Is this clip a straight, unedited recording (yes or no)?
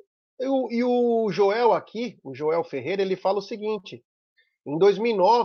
yes